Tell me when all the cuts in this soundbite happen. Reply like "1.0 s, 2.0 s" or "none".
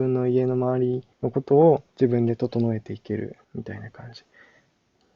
1.1 s, 1.9 s, 3.4 s